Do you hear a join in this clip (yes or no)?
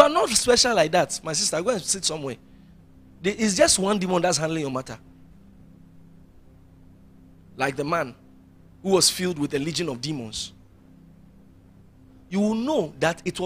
no